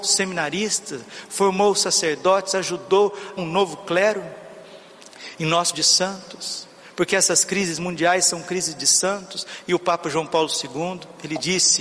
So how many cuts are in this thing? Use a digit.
2